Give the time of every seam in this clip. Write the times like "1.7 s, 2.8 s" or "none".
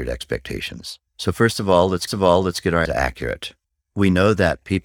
1.1 s, 2.1 s, 2.9 s, 3.6 s